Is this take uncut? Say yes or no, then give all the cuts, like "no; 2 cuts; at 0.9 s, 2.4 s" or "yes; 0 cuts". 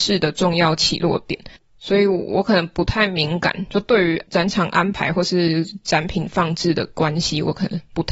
no; 1 cut; at 1.6 s